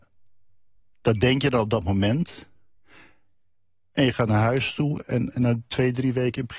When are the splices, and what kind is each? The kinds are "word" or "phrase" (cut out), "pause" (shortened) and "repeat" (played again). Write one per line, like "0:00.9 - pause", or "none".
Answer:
none